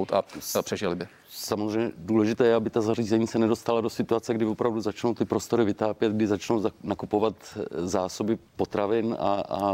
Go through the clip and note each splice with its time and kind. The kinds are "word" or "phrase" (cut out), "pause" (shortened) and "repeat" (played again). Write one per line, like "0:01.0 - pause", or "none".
0:08.5 - pause

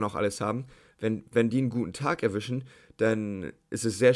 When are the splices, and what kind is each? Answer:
none

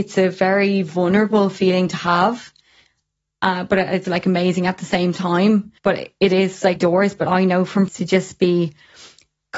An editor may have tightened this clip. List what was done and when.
0:04.0 - word
0:05.8 - pause
0:06.8 - phrase
0:07.9 - phrase

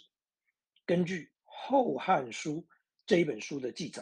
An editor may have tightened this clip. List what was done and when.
0:01.3 - pause

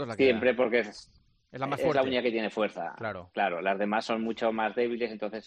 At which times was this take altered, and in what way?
none

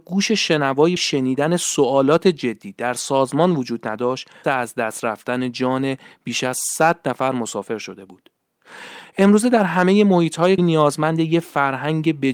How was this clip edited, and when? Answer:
0:01.0 - word
0:04.4 - word
0:10.6 - word

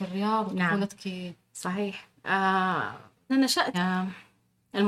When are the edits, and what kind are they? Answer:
0:03.3 - word
0:03.7 - word

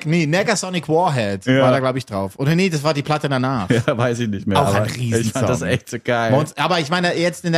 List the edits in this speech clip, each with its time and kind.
none

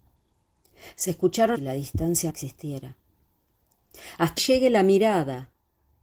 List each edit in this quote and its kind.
0:01.5 - phrase
0:02.3 - word
0:04.4 - word

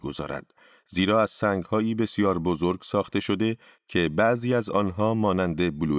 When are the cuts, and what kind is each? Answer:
none

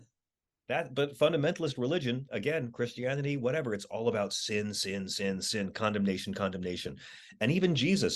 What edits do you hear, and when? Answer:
none

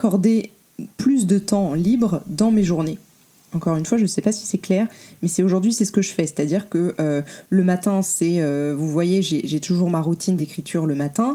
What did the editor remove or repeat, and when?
none

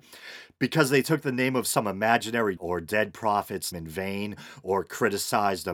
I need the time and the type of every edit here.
0:02.6 - word
0:03.7 - word

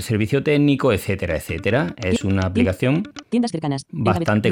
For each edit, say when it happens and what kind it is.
none

